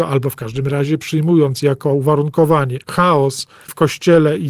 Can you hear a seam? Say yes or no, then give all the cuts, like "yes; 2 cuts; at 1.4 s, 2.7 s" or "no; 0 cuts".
yes; 1 cut; at 2.8 s